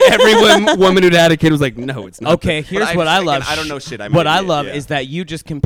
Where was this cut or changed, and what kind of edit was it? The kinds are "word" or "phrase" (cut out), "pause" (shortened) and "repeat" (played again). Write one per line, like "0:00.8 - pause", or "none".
none